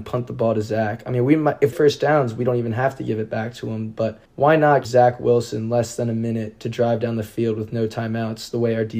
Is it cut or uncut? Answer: cut